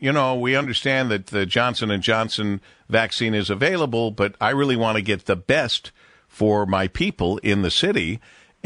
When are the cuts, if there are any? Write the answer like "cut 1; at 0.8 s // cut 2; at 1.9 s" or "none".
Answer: none